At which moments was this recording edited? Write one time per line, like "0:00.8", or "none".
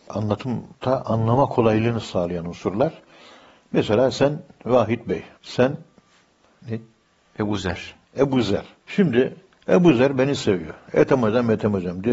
0:05.3
0:08.8